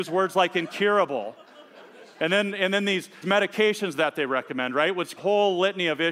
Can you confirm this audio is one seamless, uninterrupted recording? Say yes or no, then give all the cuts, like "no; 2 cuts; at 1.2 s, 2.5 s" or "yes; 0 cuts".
no; 2 cuts; at 3.2 s, 5.2 s